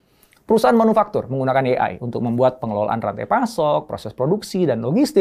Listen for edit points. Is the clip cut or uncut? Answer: uncut